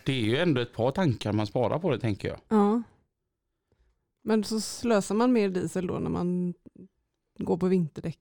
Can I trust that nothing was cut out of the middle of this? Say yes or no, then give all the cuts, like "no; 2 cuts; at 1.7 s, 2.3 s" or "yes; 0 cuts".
yes; 0 cuts